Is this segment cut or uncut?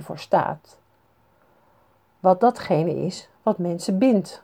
uncut